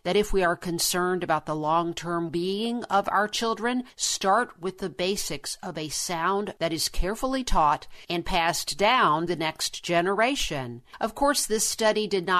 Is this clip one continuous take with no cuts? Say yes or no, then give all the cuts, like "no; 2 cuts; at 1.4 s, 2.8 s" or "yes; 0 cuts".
no; 3 cuts; at 2.3 s, 6.6 s, 9.3 s